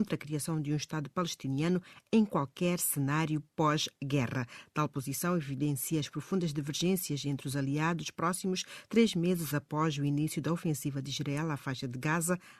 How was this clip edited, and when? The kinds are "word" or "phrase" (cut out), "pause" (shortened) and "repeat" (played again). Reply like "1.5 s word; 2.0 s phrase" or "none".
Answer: none